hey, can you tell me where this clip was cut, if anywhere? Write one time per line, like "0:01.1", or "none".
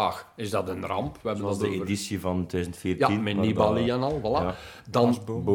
none